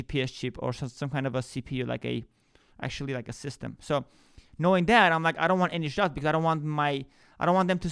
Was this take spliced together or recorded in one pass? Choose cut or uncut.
uncut